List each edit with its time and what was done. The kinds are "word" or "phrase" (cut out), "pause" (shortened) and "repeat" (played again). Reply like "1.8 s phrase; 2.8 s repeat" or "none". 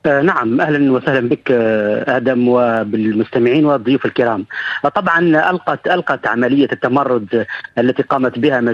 none